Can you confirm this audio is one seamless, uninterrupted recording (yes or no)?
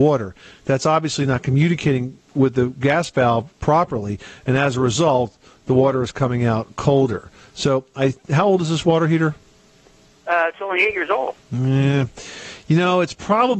no